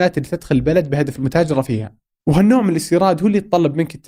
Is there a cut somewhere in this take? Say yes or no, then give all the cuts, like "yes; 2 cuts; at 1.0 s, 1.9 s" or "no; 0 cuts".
no; 0 cuts